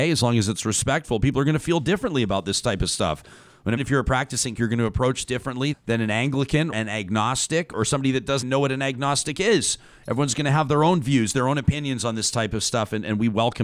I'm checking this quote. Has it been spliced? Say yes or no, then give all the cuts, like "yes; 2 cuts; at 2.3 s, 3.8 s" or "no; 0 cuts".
yes; 7 cuts; at 3.8 s, 4.5 s, 5.2 s, 5.7 s, 6.7 s, 7.7 s, 8.4 s